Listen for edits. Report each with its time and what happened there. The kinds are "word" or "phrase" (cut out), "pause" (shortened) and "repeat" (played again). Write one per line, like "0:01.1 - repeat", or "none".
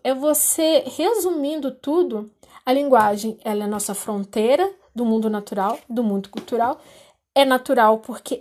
none